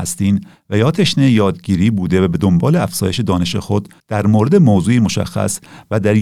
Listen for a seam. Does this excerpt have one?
yes; 1 cut; at 4.0 s

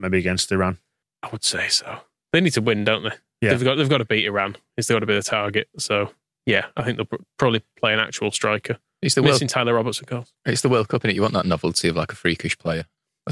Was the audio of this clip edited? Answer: no; 0 cuts

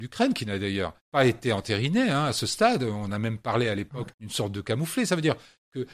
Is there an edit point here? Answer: yes; 2 cuts; at 1.0 s, 4.1 s

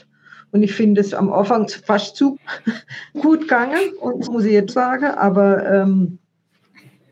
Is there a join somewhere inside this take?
yes; 6 cuts; at 1.1 s, 1.7 s, 2.3 s, 3.1 s, 4.3 s, 4.7 s

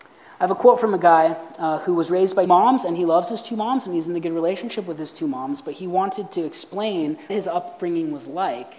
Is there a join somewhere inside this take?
yes; 2 cuts; at 2.5 s, 7.3 s

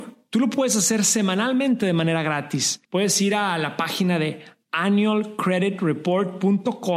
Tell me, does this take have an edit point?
yes; 1 cut; at 2.8 s

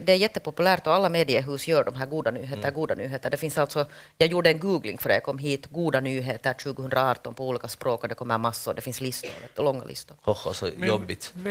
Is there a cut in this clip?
no; 0 cuts

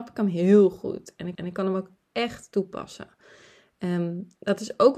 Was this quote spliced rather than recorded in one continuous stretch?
yes; 1 cut; at 1.3 s

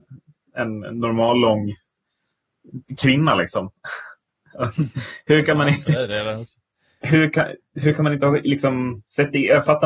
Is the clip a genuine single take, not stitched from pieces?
yes; 0 cuts

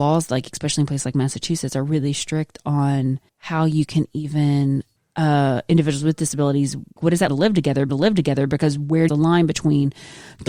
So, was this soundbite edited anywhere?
yes; 6 cuts; at 3.3 s, 5.0 s, 7.0 s, 7.3 s, 7.9 s, 9.1 s

